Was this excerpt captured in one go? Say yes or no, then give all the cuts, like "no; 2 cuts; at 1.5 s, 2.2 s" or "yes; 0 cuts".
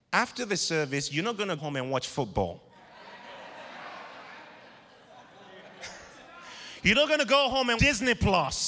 no; 2 cuts; at 1.6 s, 7.8 s